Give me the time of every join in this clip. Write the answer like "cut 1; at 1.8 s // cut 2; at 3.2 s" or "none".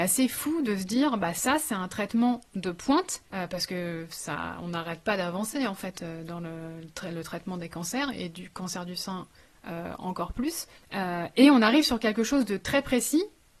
cut 1; at 3.3 s // cut 2; at 10.7 s

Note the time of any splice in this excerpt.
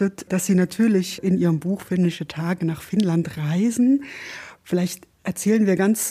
cut 1; at 1.2 s

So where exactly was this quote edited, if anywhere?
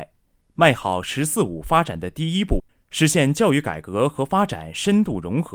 none

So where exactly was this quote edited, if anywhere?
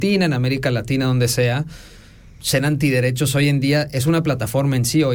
none

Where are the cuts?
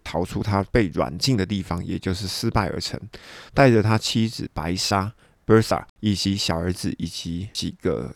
cut 1; at 5.9 s

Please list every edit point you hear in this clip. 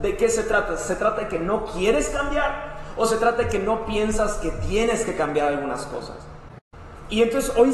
none

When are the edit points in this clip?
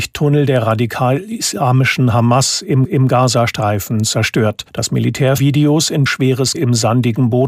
cut 1; at 2.8 s // cut 2; at 4.7 s // cut 3; at 5.4 s // cut 4; at 6.1 s // cut 5; at 6.5 s

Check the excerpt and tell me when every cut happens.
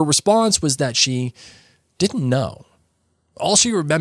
none

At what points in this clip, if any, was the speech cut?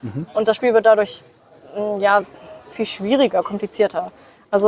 cut 1; at 2.7 s

